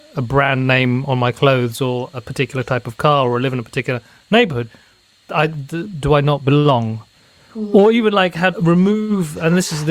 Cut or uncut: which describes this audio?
cut